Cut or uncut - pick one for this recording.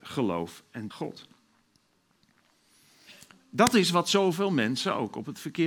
cut